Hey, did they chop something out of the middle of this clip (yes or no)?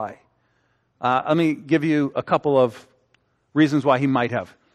no